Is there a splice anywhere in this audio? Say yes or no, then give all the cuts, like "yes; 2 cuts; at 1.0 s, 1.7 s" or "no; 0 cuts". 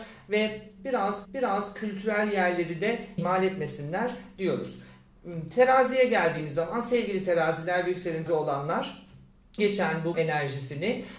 yes; 5 cuts; at 1.2 s, 3.2 s, 8.3 s, 9.6 s, 10.1 s